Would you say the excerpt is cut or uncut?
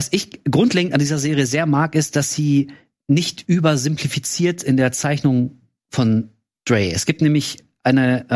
uncut